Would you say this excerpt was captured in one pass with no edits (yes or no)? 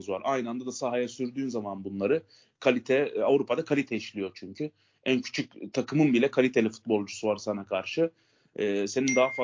yes